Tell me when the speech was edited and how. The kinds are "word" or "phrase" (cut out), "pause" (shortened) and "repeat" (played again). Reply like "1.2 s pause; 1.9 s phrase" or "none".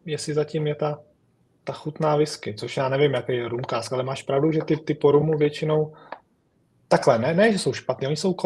1.2 s pause